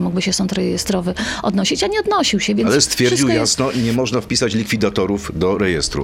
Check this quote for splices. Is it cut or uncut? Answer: uncut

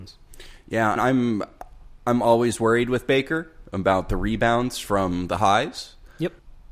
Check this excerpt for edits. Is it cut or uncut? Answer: cut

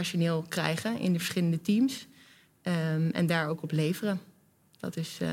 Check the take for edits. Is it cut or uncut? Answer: uncut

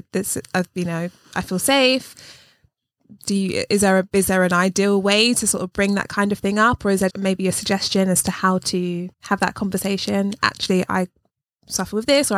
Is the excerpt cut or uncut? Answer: cut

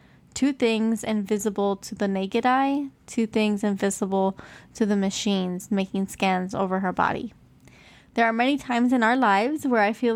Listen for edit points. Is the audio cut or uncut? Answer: uncut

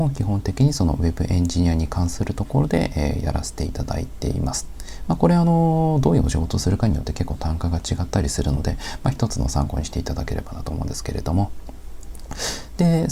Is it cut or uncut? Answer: uncut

